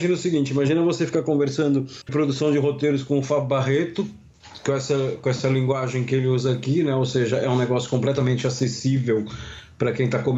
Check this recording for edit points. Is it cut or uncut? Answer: cut